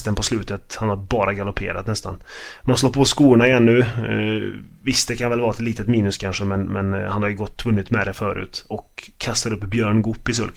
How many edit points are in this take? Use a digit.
0